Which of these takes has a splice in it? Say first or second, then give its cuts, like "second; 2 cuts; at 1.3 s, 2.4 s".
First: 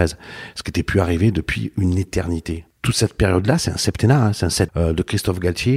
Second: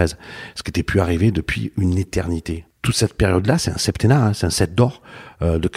first; 1 cut; at 4.7 s